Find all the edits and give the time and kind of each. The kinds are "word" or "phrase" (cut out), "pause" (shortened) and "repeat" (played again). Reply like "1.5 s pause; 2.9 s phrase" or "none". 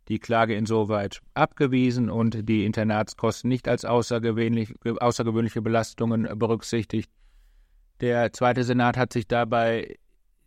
none